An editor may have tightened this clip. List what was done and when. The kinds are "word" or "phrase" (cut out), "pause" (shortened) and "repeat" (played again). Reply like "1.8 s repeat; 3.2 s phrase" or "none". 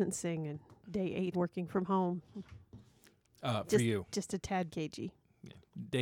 1.3 s word; 4.7 s word